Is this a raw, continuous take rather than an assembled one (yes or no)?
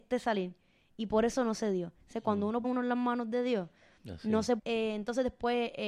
no